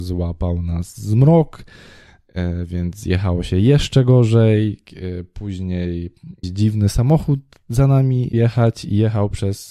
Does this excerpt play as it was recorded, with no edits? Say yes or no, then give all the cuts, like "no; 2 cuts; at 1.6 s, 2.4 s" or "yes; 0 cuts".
no; 2 cuts; at 6.4 s, 8.3 s